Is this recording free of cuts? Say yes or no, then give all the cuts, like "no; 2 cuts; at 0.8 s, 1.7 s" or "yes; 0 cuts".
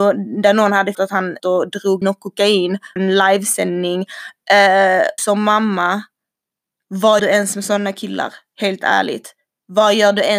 no; 6 cuts; at 0.9 s, 1.4 s, 2.0 s, 3.0 s, 5.2 s, 7.2 s